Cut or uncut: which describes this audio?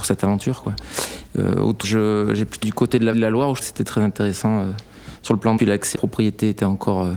cut